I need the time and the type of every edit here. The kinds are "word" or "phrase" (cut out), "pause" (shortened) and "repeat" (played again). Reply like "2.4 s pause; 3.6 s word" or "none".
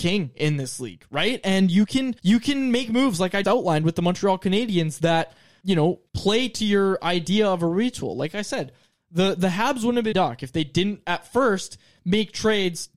2.2 s pause; 3.4 s word; 5.6 s word; 6.1 s pause; 10.1 s phrase